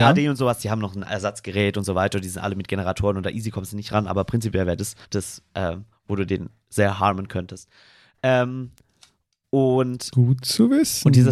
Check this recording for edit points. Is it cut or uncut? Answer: cut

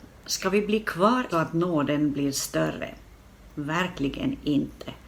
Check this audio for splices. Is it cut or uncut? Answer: cut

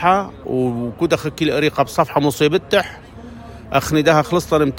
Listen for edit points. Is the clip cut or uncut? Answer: uncut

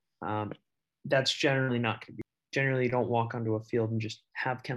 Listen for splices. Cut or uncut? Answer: uncut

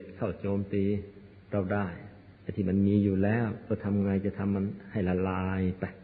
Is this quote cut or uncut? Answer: cut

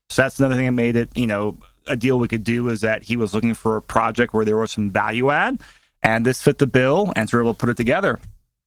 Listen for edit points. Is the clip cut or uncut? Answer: uncut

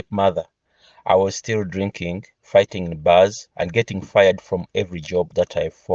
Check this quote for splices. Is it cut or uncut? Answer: cut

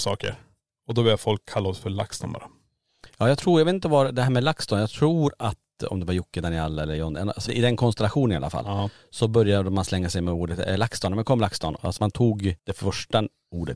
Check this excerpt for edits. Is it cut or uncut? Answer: cut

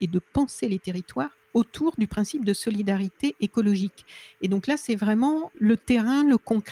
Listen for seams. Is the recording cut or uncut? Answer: uncut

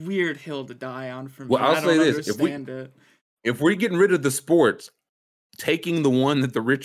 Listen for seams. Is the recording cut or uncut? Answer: uncut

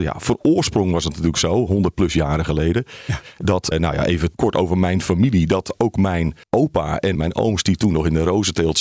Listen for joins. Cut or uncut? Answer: cut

